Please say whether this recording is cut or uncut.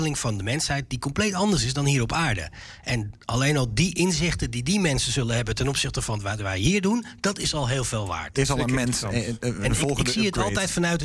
uncut